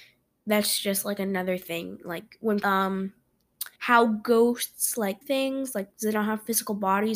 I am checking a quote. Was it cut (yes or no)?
yes